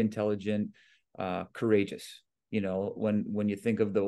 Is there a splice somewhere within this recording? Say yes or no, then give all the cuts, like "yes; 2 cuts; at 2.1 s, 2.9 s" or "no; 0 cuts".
no; 0 cuts